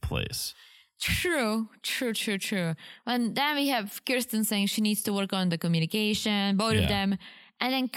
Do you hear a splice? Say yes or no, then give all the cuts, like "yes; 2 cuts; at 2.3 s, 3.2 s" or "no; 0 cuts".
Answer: no; 0 cuts